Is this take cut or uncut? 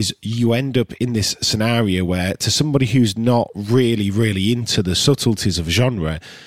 uncut